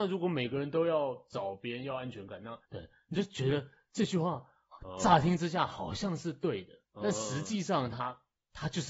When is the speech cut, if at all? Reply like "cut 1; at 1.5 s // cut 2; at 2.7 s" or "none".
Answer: cut 1; at 2.6 s // cut 2; at 6.8 s